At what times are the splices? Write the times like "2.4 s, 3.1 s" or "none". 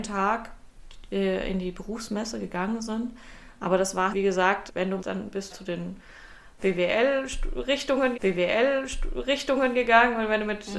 4.1 s, 4.7 s, 5.0 s, 5.5 s, 8.1 s